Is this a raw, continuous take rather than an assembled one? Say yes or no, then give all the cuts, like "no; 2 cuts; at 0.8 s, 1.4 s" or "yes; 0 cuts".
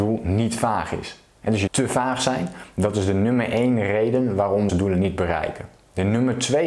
no; 2 cuts; at 1.7 s, 4.7 s